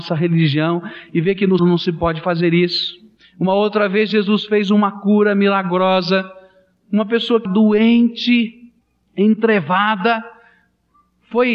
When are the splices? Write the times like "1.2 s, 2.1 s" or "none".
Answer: 1.6 s, 3.2 s, 7.5 s